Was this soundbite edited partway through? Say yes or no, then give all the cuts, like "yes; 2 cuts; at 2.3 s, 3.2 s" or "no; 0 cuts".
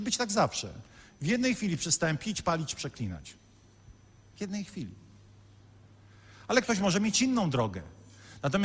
no; 0 cuts